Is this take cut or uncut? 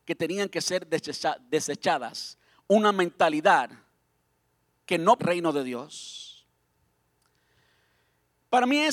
cut